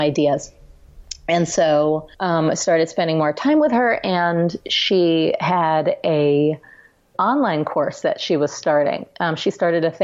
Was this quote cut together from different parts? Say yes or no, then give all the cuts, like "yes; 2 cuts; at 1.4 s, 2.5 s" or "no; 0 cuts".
yes; 2 cuts; at 2.1 s, 7.1 s